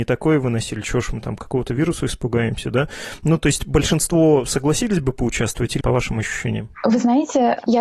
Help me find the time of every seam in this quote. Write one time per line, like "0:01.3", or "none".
0:05.8